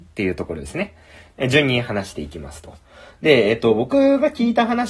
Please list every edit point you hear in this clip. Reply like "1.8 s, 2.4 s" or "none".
none